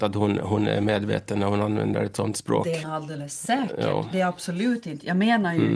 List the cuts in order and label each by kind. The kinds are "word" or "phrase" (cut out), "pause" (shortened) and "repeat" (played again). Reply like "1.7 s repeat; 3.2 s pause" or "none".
2.8 s word